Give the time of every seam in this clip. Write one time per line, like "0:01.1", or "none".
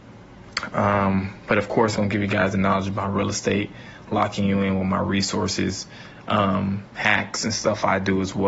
0:02.0